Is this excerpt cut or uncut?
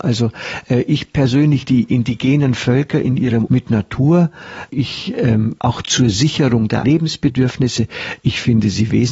cut